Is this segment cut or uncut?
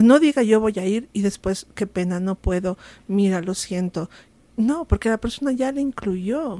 uncut